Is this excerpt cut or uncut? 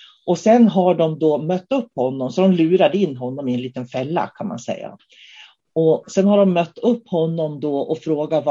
uncut